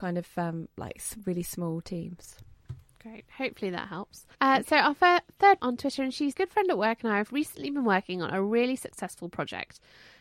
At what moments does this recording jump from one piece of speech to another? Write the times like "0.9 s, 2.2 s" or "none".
4.3 s, 5.6 s, 6.3 s